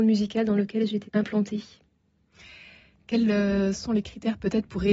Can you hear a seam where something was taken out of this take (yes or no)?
yes